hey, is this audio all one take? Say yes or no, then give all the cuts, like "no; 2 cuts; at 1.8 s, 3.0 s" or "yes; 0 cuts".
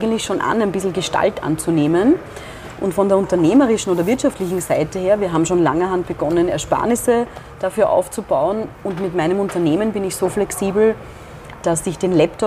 yes; 0 cuts